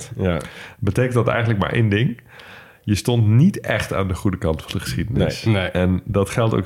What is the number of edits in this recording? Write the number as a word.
zero